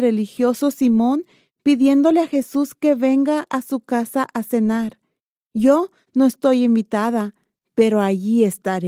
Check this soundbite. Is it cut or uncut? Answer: uncut